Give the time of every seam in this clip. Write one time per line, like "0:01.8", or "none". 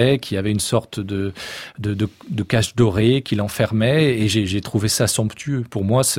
none